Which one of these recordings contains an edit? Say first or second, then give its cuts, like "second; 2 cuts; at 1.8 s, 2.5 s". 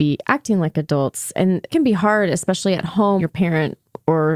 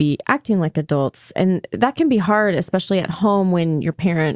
first; 2 cuts; at 1.7 s, 3.2 s